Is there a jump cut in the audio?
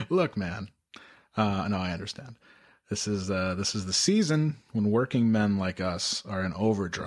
no; 0 cuts

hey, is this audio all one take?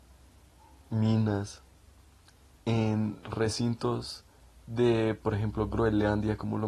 yes; 0 cuts

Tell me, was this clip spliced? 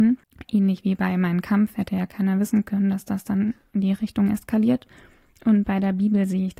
no; 0 cuts

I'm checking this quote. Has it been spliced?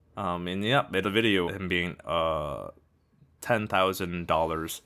yes; 3 cuts; at 1.0 s, 1.5 s, 2.0 s

